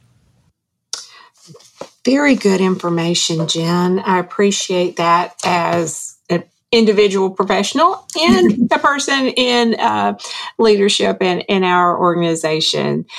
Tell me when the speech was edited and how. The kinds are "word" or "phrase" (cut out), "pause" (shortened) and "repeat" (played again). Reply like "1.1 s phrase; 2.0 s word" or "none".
none